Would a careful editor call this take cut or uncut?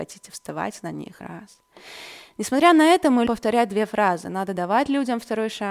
cut